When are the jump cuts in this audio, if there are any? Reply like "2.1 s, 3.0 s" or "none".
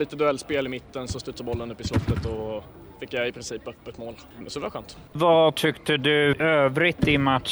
5.1 s